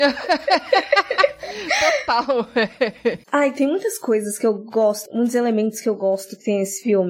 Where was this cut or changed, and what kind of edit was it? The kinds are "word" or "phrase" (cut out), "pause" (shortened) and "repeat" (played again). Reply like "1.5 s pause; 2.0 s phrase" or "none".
5.1 s word